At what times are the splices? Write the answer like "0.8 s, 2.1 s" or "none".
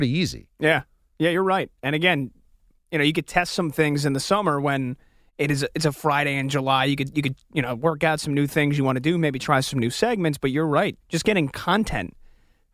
11.0 s